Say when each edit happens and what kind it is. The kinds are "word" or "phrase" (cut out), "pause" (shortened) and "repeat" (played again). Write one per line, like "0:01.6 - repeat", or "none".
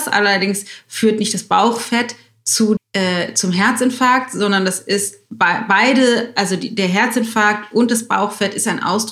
0:02.8 - word

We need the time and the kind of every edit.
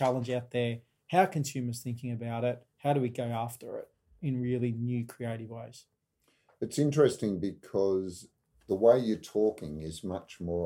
none

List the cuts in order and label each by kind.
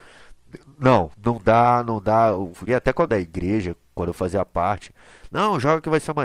0:01.1 - pause
0:02.7 - word
0:03.1 - word

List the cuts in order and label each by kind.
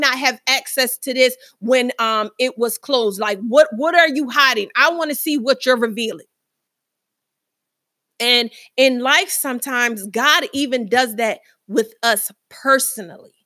none

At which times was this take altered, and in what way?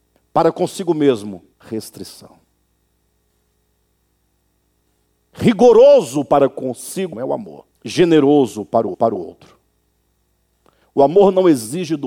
0:01.5 - pause
0:07.1 - word
0:07.7 - pause
0:08.9 - repeat

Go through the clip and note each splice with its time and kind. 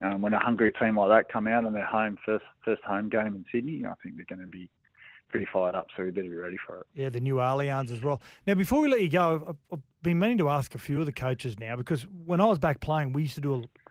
none

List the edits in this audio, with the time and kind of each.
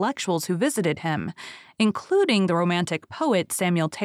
none

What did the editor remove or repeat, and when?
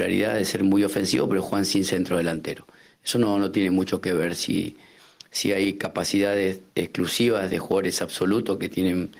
none

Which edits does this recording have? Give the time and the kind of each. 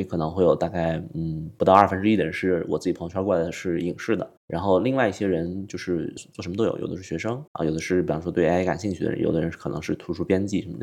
0:04.4 - pause
0:06.2 - word
0:07.5 - pause

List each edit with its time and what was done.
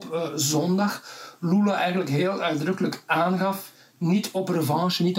none

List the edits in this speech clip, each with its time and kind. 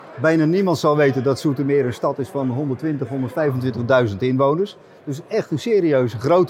none

